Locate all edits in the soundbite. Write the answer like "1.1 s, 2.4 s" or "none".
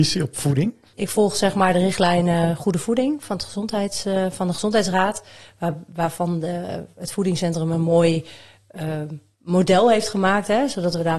none